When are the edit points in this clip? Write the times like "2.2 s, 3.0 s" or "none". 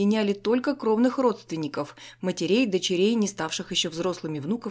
none